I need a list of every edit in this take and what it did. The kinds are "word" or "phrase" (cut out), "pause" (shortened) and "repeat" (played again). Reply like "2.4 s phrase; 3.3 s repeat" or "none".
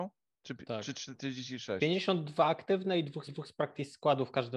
3.3 s repeat